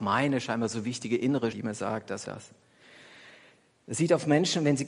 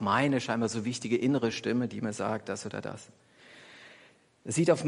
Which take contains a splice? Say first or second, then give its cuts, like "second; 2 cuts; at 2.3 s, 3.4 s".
first; 2 cuts; at 1.5 s, 2.2 s